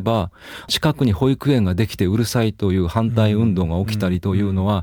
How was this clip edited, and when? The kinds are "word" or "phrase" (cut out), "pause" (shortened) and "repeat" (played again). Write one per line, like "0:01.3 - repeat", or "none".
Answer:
none